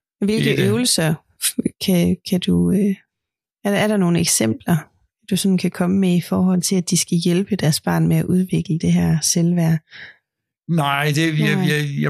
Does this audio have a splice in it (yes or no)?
no